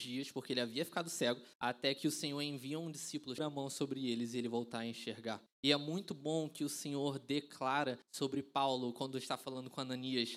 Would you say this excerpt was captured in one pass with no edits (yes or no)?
no